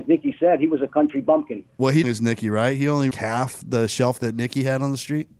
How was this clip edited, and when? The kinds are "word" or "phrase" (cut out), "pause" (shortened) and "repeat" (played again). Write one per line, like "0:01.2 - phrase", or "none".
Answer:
0:01.7 - pause
0:02.0 - phrase
0:03.1 - phrase
0:04.2 - word